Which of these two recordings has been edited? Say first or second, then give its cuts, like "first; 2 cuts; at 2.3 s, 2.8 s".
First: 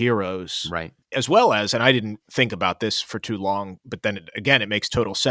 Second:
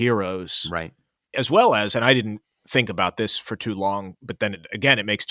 first; 2 cuts; at 1.0 s, 2.2 s